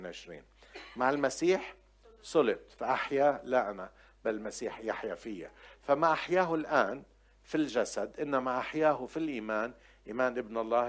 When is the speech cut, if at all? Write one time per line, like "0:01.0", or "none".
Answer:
none